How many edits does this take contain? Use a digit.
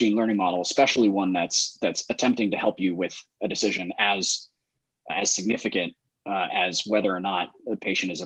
0